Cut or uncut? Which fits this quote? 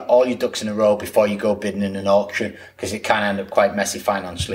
uncut